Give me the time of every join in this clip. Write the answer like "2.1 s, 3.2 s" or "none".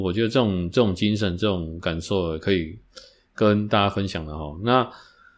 none